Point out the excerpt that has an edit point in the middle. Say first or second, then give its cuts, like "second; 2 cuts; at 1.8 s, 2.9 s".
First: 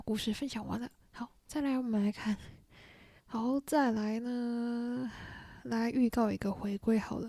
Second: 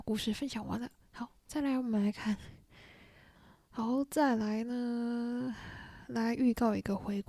first; 1 cut; at 3.2 s